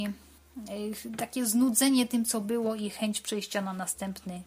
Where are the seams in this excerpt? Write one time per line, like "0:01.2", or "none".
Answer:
none